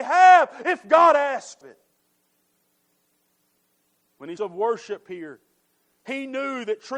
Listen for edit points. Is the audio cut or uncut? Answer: cut